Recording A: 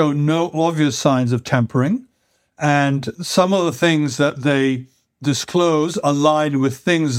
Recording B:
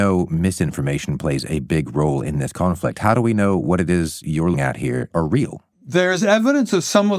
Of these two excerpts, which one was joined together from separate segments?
B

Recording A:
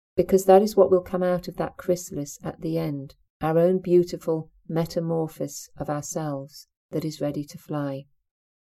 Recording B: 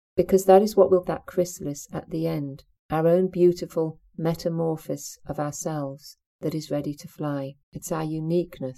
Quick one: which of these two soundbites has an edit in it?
B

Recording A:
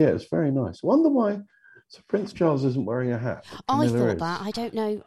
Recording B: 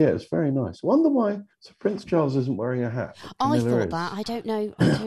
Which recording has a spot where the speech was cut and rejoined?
B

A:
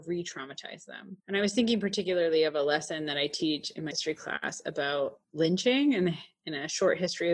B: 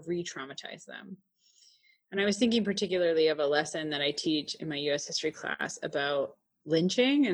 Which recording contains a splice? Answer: A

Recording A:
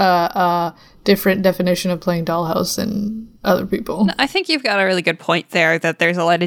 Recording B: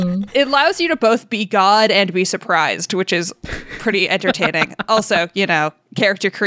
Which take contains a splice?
A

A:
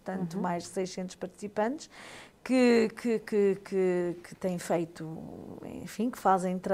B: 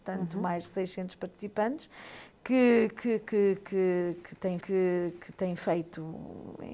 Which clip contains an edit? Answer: B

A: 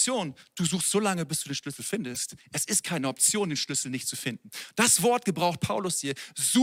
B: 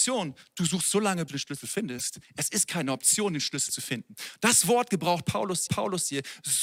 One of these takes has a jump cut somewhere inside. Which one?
B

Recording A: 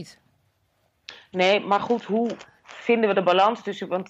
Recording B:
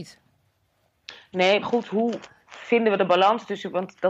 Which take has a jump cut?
B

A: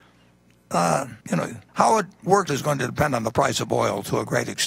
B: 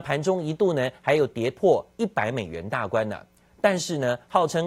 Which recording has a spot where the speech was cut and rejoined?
A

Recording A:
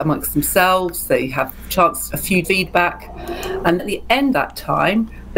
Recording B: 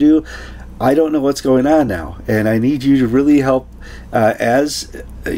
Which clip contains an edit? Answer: A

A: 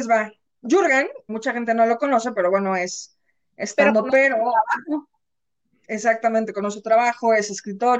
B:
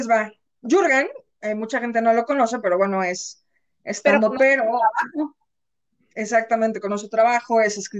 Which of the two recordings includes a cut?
A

